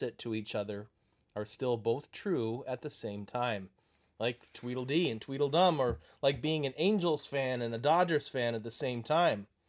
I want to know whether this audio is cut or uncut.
uncut